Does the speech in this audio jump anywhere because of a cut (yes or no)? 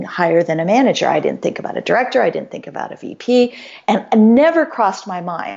no